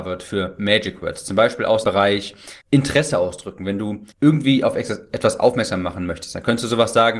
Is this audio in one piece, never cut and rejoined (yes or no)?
no